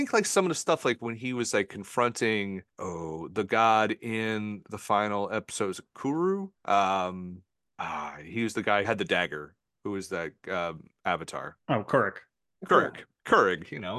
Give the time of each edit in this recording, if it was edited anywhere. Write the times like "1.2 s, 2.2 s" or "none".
8.8 s